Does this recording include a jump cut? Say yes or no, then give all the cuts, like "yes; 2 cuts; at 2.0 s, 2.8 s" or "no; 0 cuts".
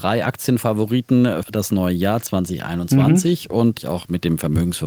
yes; 2 cuts; at 1.4 s, 3.8 s